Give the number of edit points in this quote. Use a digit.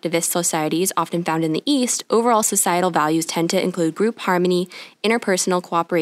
0